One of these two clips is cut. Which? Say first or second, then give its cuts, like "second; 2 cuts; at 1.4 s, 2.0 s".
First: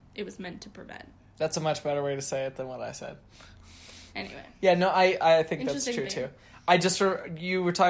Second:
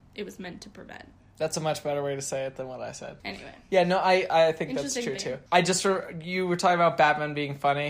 second; 2 cuts; at 3.2 s, 5.5 s